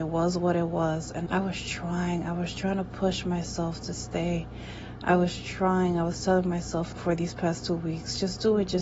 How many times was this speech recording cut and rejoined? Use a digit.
2